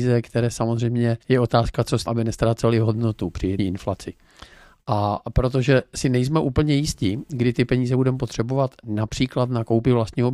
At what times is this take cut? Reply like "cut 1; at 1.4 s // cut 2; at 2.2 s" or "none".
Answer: cut 1; at 1.2 s // cut 2; at 2.1 s // cut 3; at 3.6 s